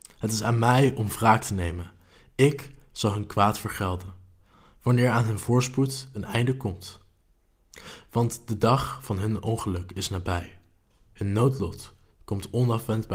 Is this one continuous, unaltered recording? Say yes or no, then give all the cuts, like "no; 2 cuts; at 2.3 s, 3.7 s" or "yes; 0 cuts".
yes; 0 cuts